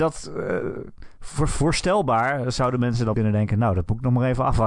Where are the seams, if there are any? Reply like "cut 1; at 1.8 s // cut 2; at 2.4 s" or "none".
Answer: cut 1; at 3.1 s